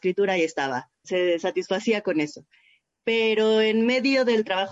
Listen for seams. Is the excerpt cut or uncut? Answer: cut